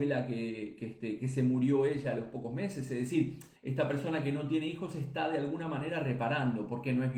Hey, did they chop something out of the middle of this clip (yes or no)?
yes